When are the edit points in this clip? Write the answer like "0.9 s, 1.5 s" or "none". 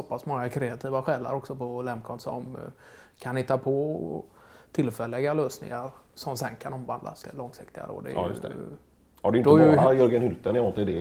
7.2 s